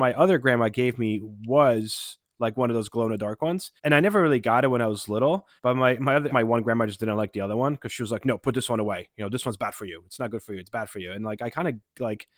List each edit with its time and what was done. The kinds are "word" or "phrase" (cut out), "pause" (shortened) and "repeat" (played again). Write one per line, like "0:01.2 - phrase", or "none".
0:03.8 - pause
0:05.6 - pause
0:06.3 - phrase